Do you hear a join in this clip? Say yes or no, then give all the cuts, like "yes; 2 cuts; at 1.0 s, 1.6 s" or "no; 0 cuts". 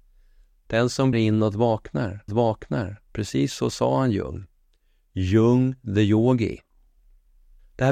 yes; 2 cuts; at 1.1 s, 2.3 s